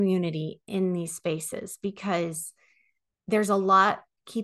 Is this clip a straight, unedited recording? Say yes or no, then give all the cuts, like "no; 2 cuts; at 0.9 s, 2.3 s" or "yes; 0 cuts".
yes; 0 cuts